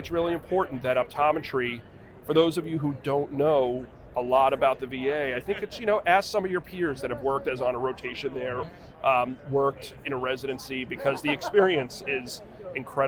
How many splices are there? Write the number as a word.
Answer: two